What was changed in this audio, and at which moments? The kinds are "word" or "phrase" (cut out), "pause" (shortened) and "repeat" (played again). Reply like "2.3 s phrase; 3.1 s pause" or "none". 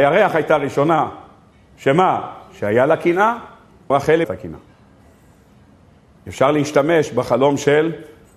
3.9 s word; 4.2 s phrase